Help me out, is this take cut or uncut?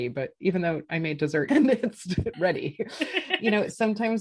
cut